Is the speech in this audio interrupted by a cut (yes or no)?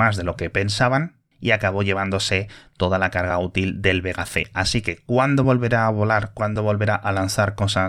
no